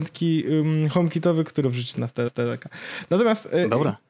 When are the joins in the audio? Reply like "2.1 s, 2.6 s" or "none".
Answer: 1.6 s, 2.3 s